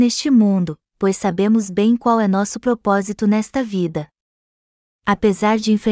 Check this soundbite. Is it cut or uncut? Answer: uncut